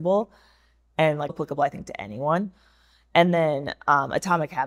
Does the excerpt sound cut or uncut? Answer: cut